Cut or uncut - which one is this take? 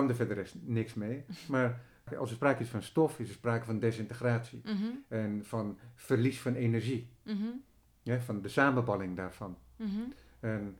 uncut